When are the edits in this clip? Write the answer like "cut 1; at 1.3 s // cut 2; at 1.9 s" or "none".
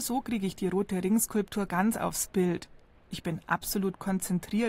none